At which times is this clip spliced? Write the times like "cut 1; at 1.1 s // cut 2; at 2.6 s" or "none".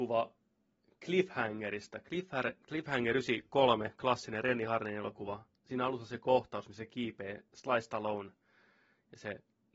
none